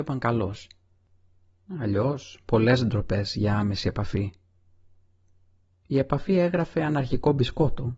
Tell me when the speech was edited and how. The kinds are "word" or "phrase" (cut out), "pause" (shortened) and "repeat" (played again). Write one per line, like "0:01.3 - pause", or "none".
none